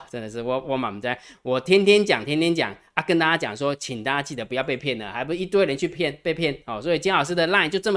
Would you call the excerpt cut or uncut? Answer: uncut